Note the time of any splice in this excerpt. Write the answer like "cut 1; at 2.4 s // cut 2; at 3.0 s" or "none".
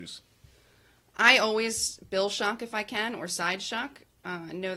none